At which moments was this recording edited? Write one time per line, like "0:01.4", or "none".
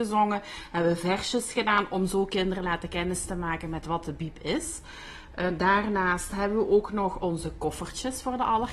none